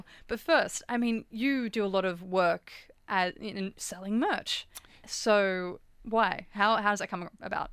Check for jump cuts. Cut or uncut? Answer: uncut